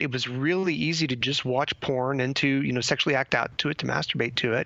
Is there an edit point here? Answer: no; 0 cuts

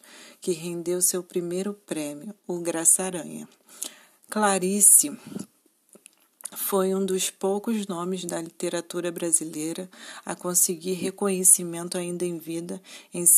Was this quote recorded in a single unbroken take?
yes; 0 cuts

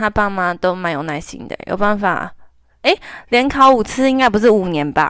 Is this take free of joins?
yes; 0 cuts

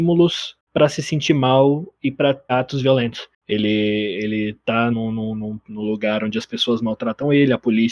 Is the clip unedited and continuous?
no; 2 cuts; at 2.5 s, 4.9 s

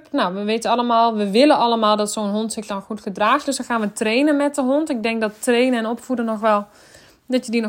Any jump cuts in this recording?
no; 0 cuts

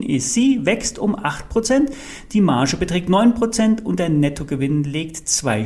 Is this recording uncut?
yes; 0 cuts

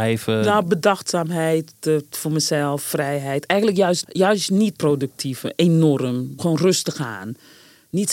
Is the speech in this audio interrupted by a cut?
yes; 4 cuts; at 2.1 s, 4.0 s, 4.8 s, 6.4 s

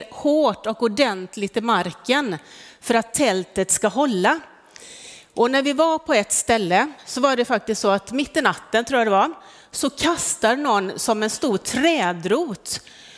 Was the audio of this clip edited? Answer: no; 0 cuts

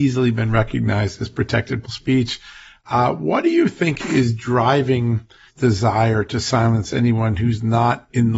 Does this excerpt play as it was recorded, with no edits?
no; 2 cuts; at 1.8 s, 5.5 s

